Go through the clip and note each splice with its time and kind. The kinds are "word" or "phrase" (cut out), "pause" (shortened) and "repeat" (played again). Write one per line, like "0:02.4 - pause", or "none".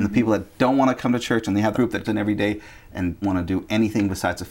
0:01.7 - word
0:02.0 - word
0:03.2 - word